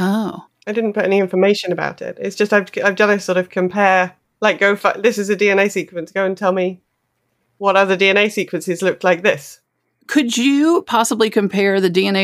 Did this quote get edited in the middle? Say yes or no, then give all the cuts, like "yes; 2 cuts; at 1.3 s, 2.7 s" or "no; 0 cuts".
no; 0 cuts